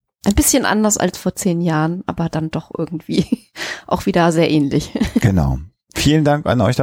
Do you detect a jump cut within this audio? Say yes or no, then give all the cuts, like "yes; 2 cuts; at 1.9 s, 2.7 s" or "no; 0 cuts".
no; 0 cuts